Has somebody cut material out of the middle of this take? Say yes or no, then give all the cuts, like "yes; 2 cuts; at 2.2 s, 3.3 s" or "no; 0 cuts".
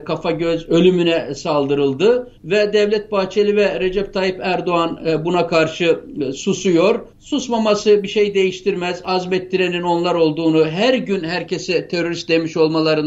yes; 2 cuts; at 2.4 s, 7.1 s